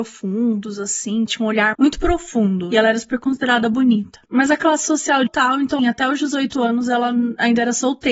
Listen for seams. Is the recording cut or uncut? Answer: cut